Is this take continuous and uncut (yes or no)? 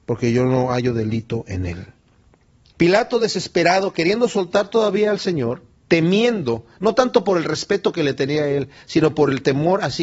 yes